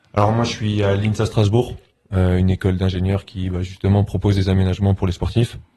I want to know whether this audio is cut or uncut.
uncut